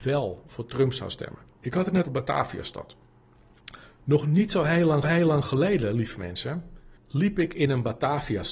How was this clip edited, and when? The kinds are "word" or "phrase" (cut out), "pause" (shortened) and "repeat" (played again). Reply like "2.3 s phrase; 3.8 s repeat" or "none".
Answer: 1.5 s pause; 2.0 s word; 5.0 s repeat; 7.0 s pause